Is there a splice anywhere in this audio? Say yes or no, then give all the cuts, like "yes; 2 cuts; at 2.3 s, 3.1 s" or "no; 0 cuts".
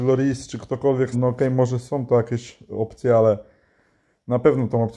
yes; 1 cut; at 1.1 s